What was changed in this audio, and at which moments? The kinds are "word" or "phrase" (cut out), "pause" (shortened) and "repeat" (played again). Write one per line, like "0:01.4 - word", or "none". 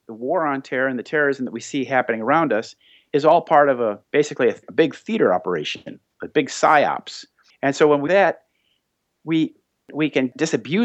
0:04.0 - pause
0:08.1 - word